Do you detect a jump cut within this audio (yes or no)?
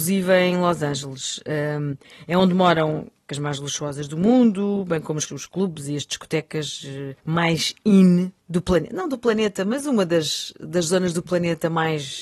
yes